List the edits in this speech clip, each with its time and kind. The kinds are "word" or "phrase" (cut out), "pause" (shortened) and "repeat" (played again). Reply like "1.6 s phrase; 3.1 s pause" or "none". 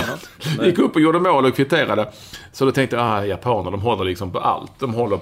none